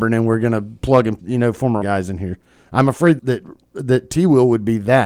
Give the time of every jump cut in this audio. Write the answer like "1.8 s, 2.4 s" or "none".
1.2 s, 1.8 s, 3.2 s